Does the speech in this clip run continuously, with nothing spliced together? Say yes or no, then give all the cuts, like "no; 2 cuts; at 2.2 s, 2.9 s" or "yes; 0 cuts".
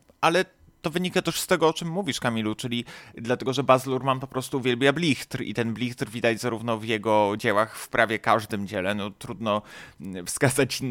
yes; 0 cuts